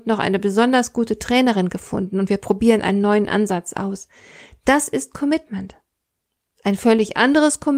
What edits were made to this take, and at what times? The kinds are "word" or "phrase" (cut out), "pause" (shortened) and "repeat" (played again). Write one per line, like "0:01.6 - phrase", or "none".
none

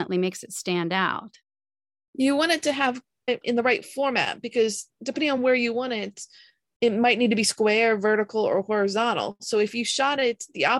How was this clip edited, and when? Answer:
none

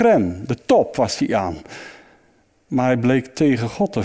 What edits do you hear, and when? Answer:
none

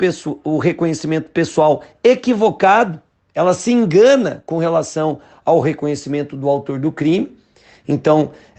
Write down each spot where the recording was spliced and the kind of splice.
none

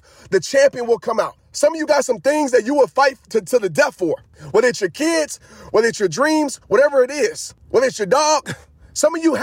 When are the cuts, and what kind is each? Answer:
0:06.6 - pause

